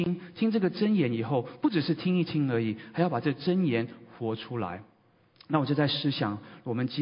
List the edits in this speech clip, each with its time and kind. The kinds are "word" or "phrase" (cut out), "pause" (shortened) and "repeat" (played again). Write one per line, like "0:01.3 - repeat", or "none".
none